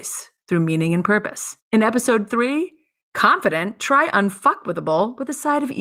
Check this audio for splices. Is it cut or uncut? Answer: cut